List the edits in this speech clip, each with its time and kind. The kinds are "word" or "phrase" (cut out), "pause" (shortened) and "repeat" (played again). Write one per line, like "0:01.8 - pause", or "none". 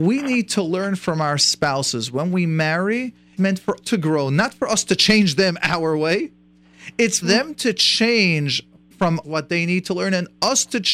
0:03.4 - word
0:03.8 - word
0:07.2 - word
0:08.9 - word
0:09.2 - word